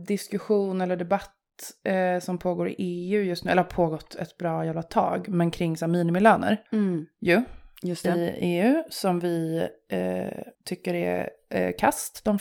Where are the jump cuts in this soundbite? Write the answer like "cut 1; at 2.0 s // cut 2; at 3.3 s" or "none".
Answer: cut 1; at 6.7 s // cut 2; at 10.5 s